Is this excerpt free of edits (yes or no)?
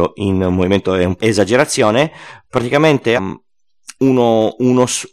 no